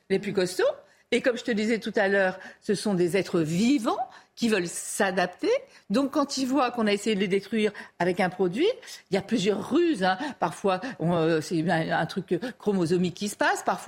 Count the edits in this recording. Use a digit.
0